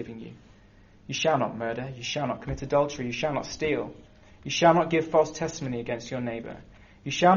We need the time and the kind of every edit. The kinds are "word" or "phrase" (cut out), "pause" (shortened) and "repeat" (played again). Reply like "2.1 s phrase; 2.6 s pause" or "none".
none